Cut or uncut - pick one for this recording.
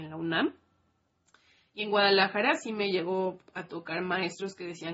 uncut